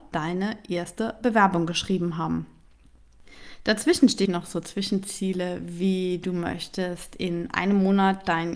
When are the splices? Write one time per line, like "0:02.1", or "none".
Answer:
0:04.2